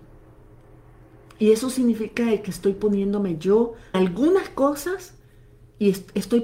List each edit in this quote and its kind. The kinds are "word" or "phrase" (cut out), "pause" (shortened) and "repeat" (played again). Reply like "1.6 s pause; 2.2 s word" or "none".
3.9 s word